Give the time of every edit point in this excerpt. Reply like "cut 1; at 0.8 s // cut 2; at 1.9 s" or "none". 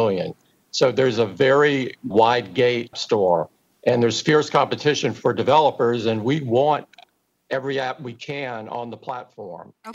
cut 1; at 2.1 s // cut 2; at 2.9 s // cut 3; at 3.6 s